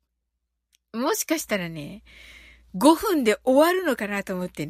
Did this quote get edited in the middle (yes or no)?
no